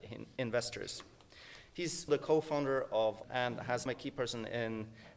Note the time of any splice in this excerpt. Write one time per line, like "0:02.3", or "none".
0:02.1
0:03.2
0:03.9